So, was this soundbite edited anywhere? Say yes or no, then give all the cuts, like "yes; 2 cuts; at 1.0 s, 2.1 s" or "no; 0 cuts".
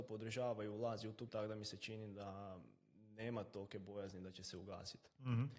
yes; 2 cuts; at 1.3 s, 2.9 s